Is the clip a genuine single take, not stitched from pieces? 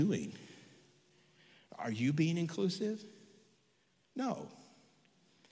yes; 0 cuts

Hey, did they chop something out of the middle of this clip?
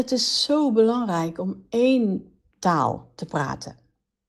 yes; 1 cut; at 2.4 s

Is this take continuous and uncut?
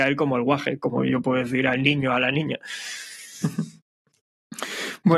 yes; 0 cuts

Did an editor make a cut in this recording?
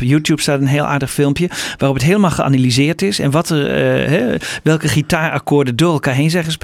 no; 0 cuts

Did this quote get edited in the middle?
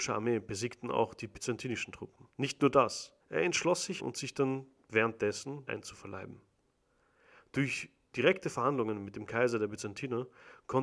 yes; 4 cuts; at 2.3 s, 3.2 s, 4.0 s, 5.7 s

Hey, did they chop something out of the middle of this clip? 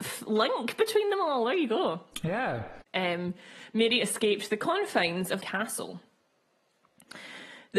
yes; 2 cuts; at 2.9 s, 5.4 s

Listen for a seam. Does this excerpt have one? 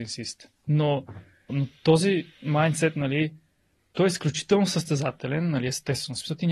yes; 2 cuts; at 1.5 s, 3.9 s

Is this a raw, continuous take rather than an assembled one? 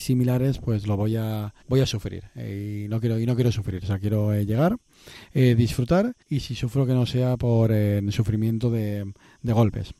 no; 2 cuts; at 1.6 s, 6.2 s

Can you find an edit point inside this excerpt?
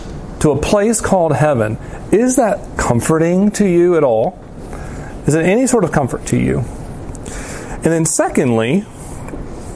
no; 0 cuts

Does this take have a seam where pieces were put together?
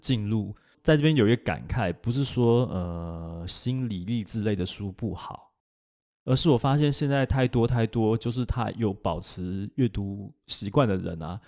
no; 0 cuts

